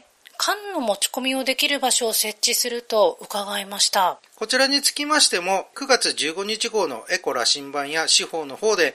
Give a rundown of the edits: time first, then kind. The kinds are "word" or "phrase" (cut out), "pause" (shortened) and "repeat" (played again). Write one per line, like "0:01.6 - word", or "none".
0:04.3 - pause